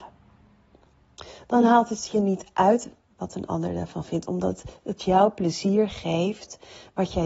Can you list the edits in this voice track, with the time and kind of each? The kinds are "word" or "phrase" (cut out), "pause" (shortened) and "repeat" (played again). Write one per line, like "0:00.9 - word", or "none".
none